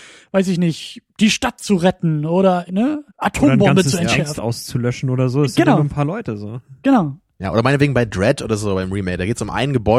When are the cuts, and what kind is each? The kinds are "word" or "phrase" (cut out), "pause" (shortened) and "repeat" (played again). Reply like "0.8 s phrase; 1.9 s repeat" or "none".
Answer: 2.7 s word; 3.1 s pause; 4.4 s phrase